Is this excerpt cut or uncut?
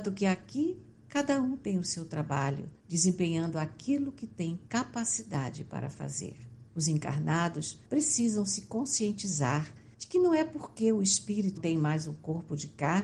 cut